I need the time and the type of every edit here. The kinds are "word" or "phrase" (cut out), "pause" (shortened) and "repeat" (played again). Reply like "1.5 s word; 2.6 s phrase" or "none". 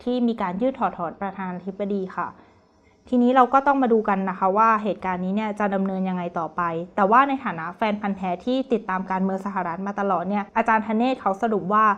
10.5 s pause